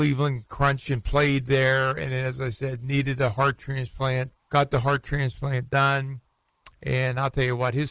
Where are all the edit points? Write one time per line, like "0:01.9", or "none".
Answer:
0:04.4